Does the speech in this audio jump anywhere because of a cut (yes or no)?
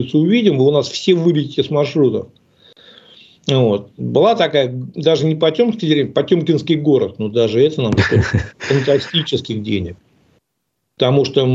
no